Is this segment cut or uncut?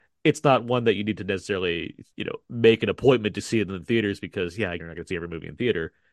cut